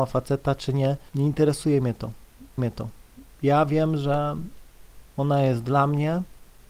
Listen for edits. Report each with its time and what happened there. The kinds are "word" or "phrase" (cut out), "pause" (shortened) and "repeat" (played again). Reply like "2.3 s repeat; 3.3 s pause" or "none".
1.1 s pause; 2.6 s repeat